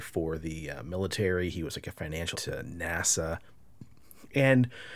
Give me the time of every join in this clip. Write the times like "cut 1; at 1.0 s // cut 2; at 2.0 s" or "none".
cut 1; at 2.3 s